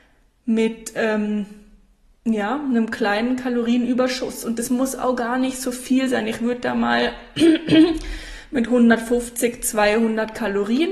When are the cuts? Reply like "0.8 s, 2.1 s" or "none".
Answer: none